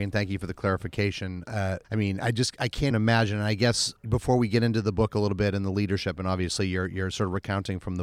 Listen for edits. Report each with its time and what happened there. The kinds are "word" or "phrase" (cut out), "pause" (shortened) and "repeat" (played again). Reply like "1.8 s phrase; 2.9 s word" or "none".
1.8 s pause; 2.9 s word; 4.0 s pause